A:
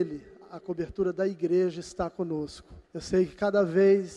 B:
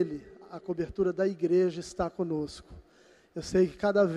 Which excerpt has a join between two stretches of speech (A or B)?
A